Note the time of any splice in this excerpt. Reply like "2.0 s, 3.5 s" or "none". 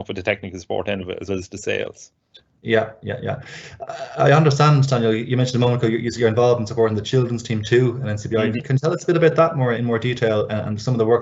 1.3 s, 9.7 s